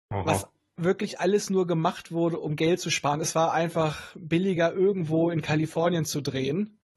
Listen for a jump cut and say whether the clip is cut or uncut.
uncut